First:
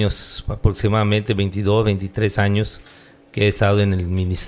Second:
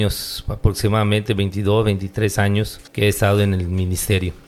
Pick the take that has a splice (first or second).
second